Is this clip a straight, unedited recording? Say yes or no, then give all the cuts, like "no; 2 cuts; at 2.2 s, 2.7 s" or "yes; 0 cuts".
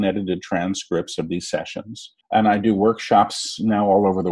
no; 1 cut; at 2.2 s